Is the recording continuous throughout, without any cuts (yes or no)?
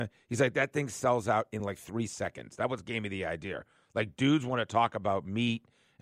yes